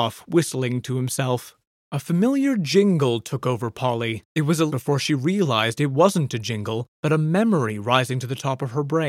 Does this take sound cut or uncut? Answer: cut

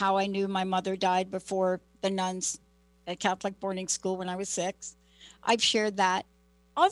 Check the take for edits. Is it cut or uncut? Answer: uncut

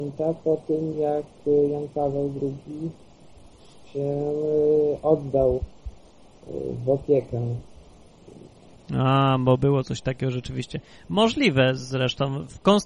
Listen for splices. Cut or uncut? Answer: uncut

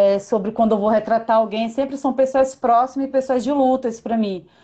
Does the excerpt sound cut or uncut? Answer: uncut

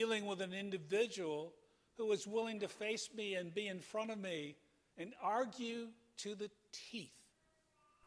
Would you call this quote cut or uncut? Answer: uncut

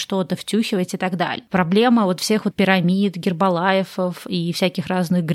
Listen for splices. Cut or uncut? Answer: cut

